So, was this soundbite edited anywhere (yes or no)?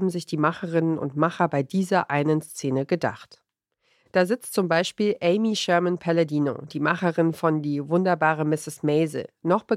no